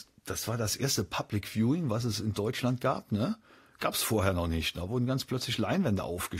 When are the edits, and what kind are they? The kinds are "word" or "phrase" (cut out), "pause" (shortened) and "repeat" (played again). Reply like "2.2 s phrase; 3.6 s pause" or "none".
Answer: none